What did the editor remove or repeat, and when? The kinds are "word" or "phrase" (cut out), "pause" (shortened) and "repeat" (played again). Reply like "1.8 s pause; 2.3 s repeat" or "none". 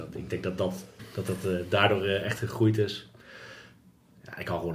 1.0 s word